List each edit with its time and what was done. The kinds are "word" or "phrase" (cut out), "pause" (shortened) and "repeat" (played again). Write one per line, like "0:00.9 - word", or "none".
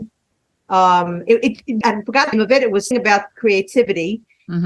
0:01.8 - word
0:02.3 - word
0:02.9 - word